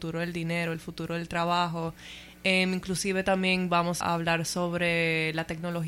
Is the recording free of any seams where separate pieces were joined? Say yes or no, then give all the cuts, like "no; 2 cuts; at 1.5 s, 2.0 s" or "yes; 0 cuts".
no; 1 cut; at 4.0 s